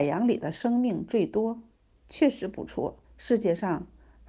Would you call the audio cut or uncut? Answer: cut